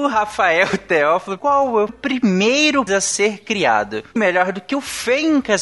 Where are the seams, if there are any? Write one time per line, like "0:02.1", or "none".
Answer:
0:01.4
0:01.9
0:02.9
0:04.2